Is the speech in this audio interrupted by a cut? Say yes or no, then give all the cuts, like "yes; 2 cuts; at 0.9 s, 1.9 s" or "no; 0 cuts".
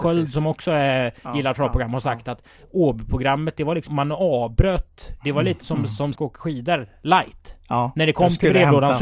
yes; 2 cuts; at 3.9 s, 6.2 s